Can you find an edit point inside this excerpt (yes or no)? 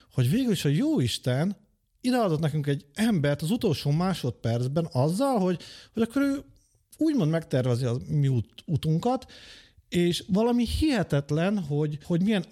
no